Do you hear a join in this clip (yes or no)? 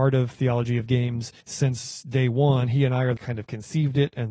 yes